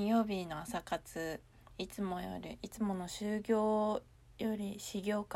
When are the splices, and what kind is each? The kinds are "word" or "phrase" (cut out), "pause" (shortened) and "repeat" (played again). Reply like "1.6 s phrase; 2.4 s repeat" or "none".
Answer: none